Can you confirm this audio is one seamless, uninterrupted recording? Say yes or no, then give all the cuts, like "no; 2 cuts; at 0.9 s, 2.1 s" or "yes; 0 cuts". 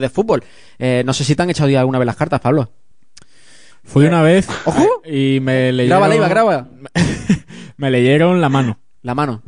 yes; 0 cuts